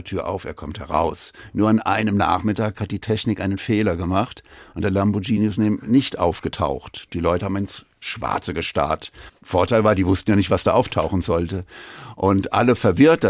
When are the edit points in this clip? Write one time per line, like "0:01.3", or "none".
none